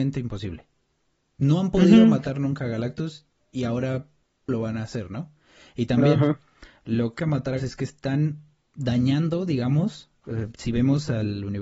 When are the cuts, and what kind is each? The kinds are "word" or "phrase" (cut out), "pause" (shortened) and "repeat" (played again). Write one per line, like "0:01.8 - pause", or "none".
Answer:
0:04.5 - word
0:07.2 - word
0:07.6 - word
0:08.7 - word